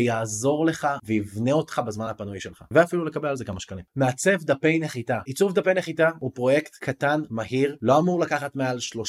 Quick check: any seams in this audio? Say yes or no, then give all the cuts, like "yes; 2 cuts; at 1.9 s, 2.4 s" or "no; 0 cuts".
no; 0 cuts